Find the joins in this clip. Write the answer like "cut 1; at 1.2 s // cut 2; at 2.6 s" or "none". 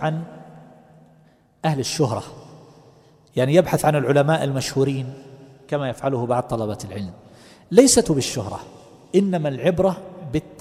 cut 1; at 8.0 s